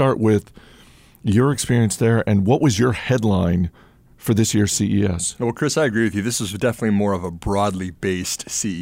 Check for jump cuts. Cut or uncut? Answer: uncut